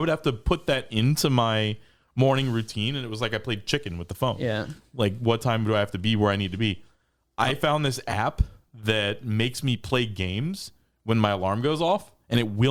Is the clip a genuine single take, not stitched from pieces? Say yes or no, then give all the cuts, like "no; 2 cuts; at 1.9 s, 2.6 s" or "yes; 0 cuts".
yes; 0 cuts